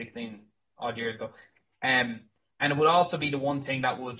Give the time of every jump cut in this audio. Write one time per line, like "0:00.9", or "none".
none